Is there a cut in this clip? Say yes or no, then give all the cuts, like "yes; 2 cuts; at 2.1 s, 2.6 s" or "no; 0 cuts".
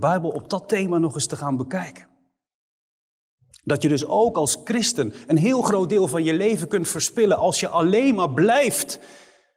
no; 0 cuts